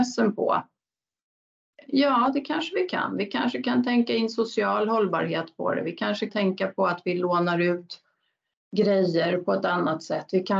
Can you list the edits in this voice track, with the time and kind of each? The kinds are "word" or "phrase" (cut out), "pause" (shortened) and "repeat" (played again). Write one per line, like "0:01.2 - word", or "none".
0:06.3 - word